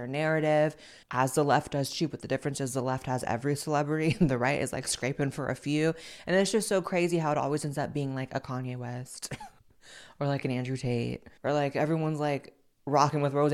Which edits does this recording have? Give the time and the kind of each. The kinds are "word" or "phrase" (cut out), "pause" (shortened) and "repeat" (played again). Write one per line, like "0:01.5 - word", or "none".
0:01.0 - pause
0:09.6 - pause
0:11.4 - pause